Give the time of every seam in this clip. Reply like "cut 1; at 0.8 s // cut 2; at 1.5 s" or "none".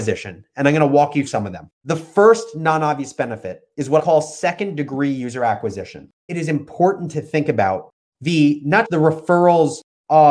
cut 1; at 1.3 s // cut 2; at 1.7 s // cut 3; at 4.0 s // cut 4; at 6.3 s // cut 5; at 8.8 s